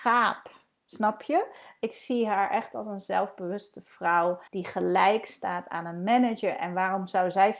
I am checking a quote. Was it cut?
yes; 1 cut; at 4.5 s

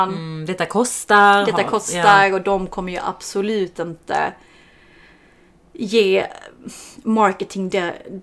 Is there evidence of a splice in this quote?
no; 0 cuts

